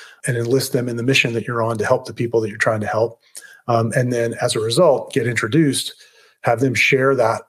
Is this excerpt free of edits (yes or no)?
yes